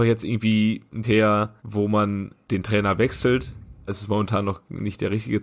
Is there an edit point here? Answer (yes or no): yes